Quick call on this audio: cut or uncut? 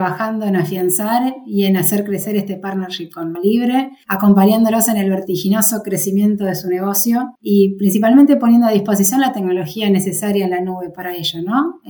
cut